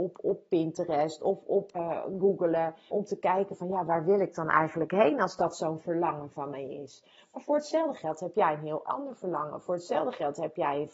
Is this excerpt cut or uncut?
cut